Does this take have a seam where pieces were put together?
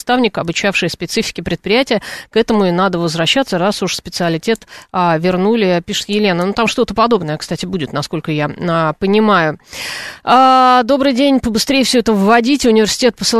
no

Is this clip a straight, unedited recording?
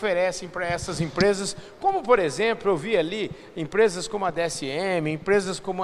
yes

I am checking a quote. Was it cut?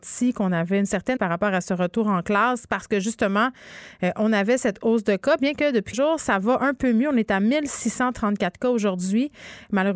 yes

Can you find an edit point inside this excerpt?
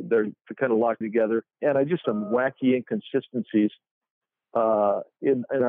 yes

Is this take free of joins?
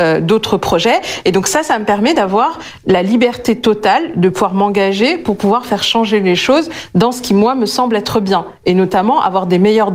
yes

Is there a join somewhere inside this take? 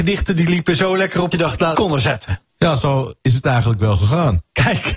yes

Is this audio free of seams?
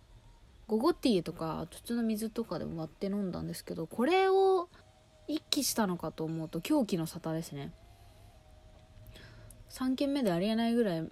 no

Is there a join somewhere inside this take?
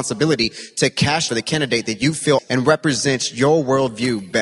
yes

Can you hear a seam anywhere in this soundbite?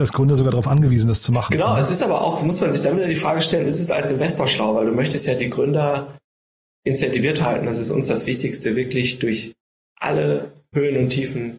no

